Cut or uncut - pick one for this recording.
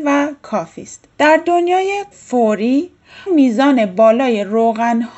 cut